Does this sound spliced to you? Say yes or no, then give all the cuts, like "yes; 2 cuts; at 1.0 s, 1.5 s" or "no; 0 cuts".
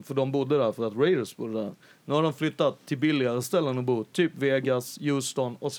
no; 0 cuts